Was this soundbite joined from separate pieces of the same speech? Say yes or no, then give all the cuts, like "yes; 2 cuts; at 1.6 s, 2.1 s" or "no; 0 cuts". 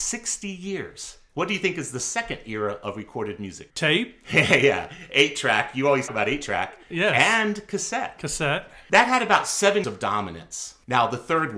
yes; 2 cuts; at 6.1 s, 9.8 s